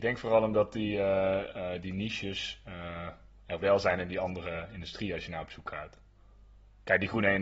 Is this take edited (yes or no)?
no